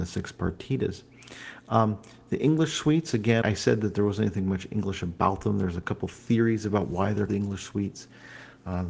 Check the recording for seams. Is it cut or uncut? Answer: cut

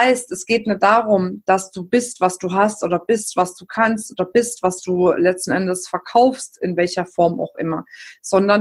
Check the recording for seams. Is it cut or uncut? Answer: uncut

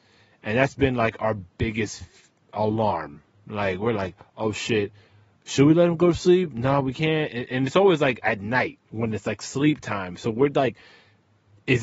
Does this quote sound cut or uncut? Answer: uncut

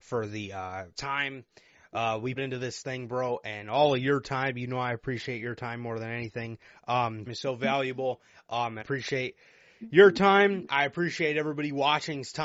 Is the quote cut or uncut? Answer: cut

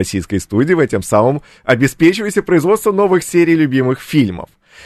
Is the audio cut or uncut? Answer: uncut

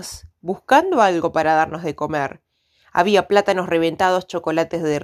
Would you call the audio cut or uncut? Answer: uncut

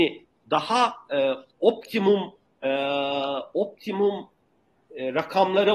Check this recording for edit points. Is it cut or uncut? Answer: uncut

